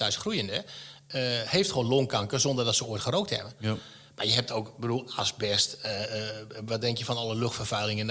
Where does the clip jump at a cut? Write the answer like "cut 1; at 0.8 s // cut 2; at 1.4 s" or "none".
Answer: none